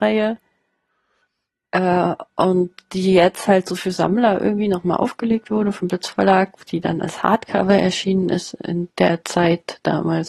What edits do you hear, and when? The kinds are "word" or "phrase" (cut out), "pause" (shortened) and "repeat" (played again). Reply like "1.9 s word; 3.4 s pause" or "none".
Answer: none